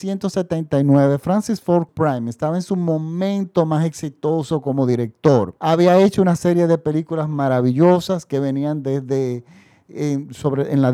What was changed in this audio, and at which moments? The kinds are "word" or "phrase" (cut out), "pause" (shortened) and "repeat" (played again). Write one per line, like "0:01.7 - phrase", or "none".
0:01.9 - phrase
0:05.6 - pause